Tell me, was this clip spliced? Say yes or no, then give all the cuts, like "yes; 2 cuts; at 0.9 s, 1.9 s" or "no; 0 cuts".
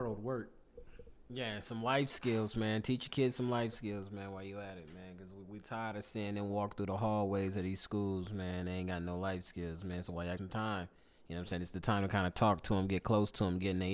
yes; 1 cut; at 10.4 s